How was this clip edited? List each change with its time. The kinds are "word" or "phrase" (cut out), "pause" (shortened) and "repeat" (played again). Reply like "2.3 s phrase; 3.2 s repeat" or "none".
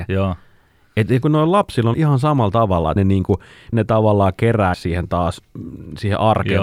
1.2 s phrase; 1.9 s word; 3.0 s word; 3.7 s word; 4.7 s word

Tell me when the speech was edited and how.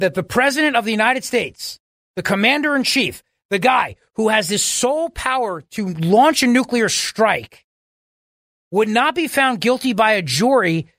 none

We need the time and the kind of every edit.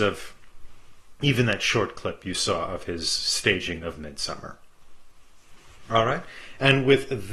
none

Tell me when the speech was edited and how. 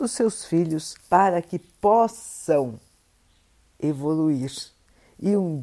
1.0 s pause

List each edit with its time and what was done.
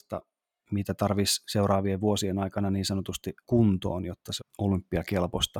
3.4 s word; 4.4 s phrase

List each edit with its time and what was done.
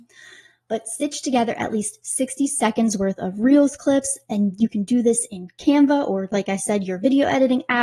none

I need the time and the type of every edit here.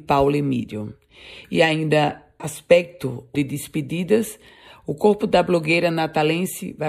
2.4 s word; 3.3 s phrase

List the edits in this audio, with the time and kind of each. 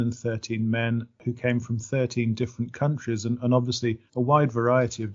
4.1 s pause

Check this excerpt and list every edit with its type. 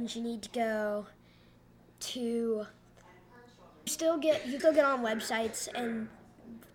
3.9 s word; 4.6 s word

